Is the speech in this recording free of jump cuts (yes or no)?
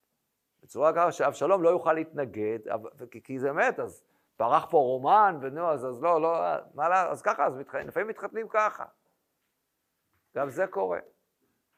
yes